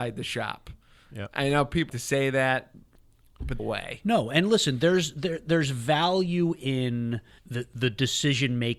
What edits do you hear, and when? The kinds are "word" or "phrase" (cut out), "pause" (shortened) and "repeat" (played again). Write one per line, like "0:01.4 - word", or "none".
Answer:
0:01.9 - word
0:03.6 - phrase
0:07.4 - word